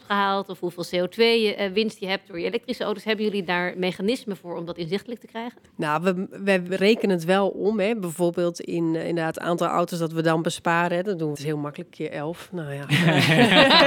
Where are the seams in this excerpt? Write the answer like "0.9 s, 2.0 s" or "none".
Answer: 6.7 s, 11.4 s